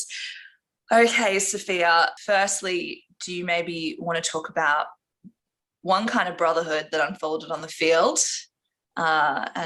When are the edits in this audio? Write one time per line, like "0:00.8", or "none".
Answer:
none